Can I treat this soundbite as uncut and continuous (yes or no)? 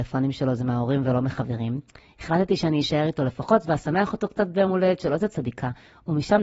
yes